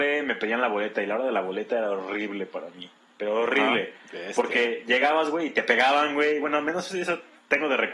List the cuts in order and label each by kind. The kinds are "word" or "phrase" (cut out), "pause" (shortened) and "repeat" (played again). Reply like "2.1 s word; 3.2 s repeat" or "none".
none